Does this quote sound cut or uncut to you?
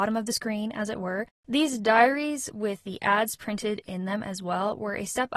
uncut